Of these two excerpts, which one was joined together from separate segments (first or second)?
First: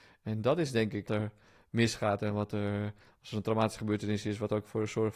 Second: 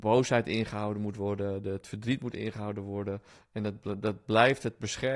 first